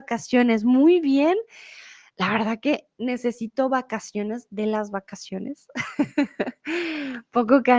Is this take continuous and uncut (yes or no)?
yes